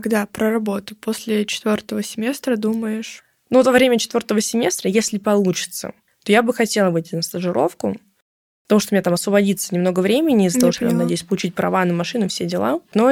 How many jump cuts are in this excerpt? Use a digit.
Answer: 0